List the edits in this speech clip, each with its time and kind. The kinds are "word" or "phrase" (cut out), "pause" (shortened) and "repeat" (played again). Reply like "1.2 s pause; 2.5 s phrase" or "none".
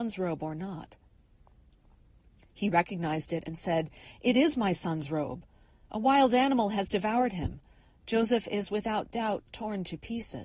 none